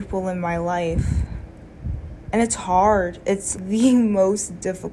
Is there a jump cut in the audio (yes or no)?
yes